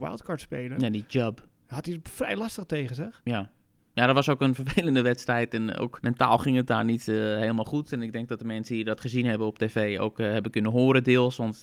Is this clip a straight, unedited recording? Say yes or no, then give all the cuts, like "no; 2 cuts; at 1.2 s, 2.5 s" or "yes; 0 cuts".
yes; 0 cuts